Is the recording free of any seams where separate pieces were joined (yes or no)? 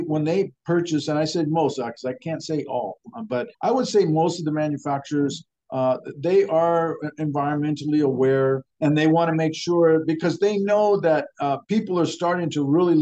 no